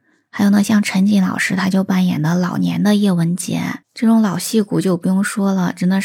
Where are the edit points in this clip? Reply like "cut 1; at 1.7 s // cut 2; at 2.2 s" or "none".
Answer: cut 1; at 3.8 s